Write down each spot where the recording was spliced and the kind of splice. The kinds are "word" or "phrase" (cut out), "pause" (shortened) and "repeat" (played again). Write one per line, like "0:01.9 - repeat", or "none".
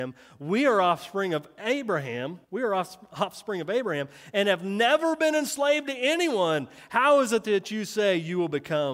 0:02.4 - pause